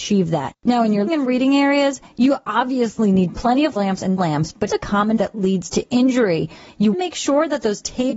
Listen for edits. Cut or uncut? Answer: cut